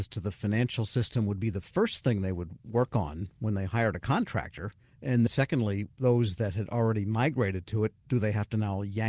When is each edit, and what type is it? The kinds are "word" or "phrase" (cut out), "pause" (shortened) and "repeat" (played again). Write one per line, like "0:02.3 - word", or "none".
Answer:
0:05.3 - word

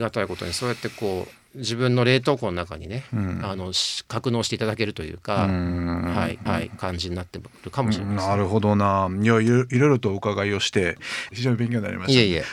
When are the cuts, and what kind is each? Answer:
0:06.5 - repeat

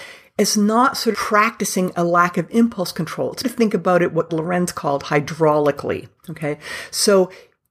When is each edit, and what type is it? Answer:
0:01.1 - word
0:03.4 - word
0:04.3 - word
0:06.2 - pause

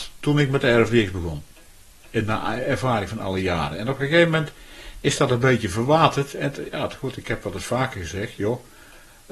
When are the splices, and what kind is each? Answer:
0:01.8 - pause

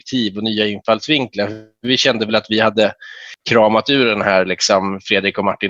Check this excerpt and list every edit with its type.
none

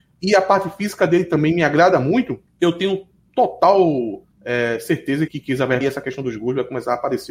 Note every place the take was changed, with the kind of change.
0:02.5 - pause
0:04.3 - pause
0:05.3 - word
0:05.8 - word

